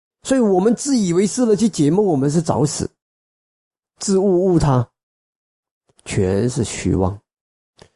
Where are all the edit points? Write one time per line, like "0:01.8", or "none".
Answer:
none